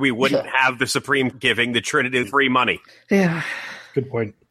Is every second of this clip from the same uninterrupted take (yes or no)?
no